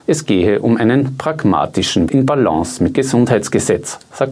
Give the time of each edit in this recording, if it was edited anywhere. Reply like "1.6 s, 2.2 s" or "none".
2.1 s, 2.9 s